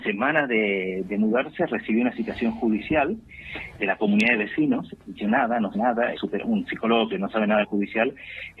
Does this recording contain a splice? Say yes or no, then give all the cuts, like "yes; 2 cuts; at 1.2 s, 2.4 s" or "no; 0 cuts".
yes; 5 cuts; at 3.8 s, 5.3 s, 5.7 s, 6.2 s, 7.6 s